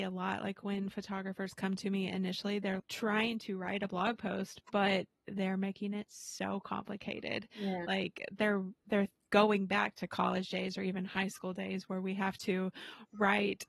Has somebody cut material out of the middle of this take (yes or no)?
yes